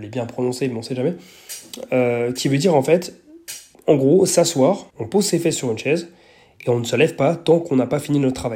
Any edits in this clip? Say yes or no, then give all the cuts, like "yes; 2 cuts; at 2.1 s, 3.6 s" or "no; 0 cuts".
yes; 2 cuts; at 3.7 s, 4.9 s